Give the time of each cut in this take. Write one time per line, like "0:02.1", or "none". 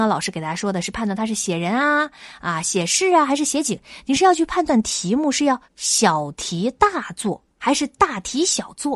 0:05.7
0:07.5